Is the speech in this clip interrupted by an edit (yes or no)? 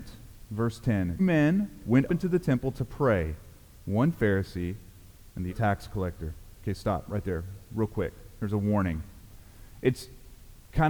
yes